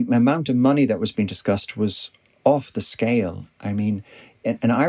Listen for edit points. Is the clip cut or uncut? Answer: uncut